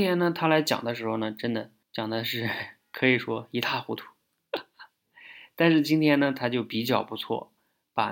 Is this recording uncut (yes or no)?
no